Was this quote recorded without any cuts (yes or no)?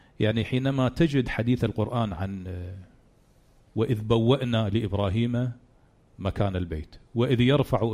yes